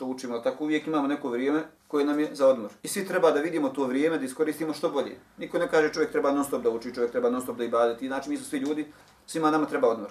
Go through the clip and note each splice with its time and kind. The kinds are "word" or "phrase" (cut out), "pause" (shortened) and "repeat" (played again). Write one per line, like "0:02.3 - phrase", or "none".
0:01.8 - pause
0:02.8 - pause